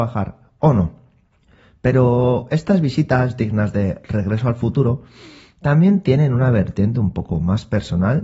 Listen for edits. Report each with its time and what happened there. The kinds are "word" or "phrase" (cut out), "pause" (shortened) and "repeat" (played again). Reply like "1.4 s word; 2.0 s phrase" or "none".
1.4 s pause